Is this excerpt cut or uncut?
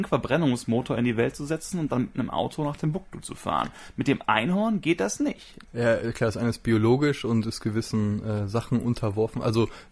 cut